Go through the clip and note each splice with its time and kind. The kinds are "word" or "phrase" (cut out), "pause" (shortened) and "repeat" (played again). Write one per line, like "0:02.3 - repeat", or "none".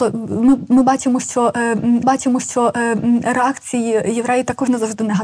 0:02.0 - repeat